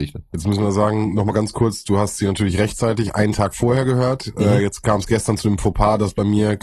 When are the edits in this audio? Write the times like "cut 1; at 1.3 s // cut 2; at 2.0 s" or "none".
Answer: none

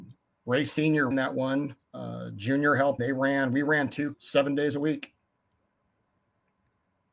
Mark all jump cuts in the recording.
cut 1; at 1.1 s // cut 2; at 1.8 s // cut 3; at 3.0 s // cut 4; at 4.1 s

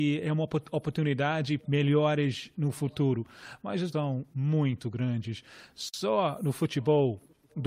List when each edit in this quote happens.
cut 1; at 1.6 s // cut 2; at 3.9 s // cut 3; at 4.3 s

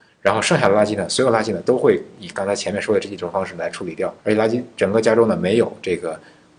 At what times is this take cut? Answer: cut 1; at 4.2 s

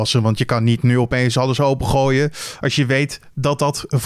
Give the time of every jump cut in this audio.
none

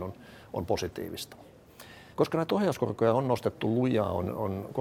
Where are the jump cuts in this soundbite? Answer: cut 1; at 2.1 s

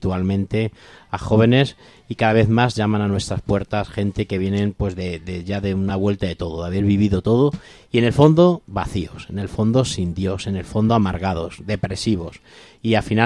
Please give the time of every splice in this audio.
none

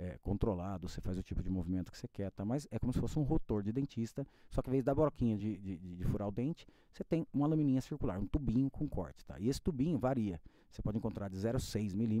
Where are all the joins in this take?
none

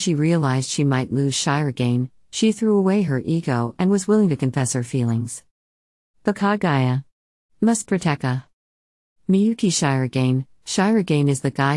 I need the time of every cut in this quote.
none

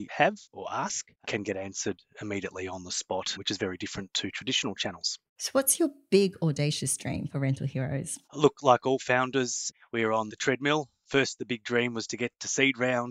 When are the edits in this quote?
cut 1; at 1.2 s // cut 2; at 5.3 s // cut 3; at 8.2 s

